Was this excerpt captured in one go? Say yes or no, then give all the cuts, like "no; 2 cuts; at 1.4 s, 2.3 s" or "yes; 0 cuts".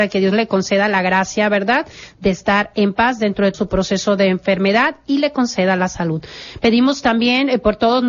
no; 1 cut; at 3.5 s